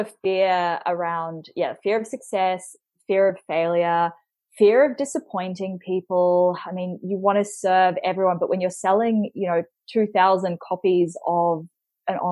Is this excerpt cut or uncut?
uncut